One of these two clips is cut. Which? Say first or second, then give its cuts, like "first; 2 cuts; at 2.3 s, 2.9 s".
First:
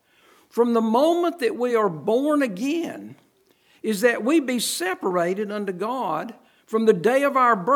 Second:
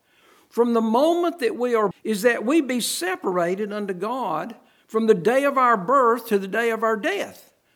second; 1 cut; at 1.9 s